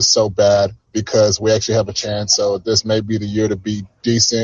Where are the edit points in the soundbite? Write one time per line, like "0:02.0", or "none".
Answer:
none